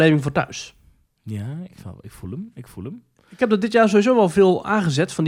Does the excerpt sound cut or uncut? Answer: uncut